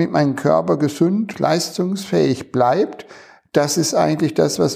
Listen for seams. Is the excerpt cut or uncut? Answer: cut